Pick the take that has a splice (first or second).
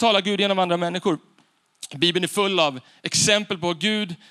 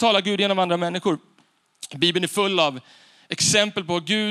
first